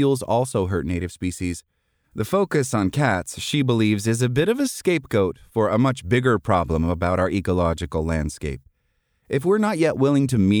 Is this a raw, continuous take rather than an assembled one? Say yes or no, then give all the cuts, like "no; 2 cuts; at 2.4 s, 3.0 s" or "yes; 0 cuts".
yes; 0 cuts